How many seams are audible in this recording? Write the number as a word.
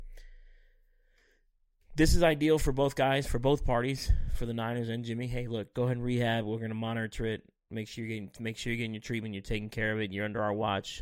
one